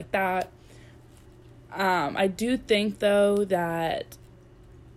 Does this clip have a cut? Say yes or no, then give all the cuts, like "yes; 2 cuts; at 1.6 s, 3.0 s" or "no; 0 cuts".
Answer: no; 0 cuts